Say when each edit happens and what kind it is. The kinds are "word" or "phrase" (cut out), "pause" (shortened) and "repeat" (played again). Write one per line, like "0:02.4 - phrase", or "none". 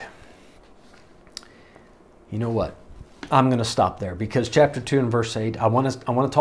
none